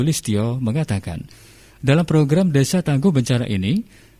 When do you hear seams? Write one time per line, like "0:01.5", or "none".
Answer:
none